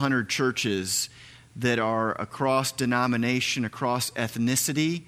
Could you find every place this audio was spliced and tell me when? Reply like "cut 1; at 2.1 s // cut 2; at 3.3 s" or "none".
none